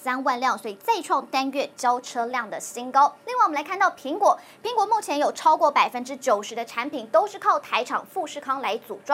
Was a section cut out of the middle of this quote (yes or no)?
yes